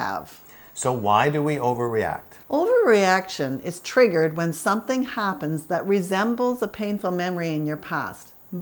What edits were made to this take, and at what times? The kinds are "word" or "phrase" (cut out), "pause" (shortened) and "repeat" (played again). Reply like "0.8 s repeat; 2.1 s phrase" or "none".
2.4 s pause